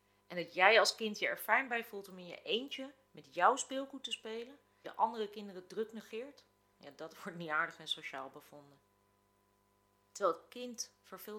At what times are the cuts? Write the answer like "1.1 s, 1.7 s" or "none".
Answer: 4.8 s